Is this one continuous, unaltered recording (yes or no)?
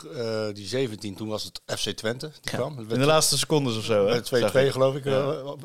yes